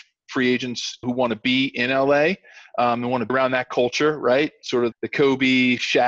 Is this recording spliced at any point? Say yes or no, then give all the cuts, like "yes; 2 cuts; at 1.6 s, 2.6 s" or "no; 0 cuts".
yes; 3 cuts; at 1.0 s, 3.3 s, 4.9 s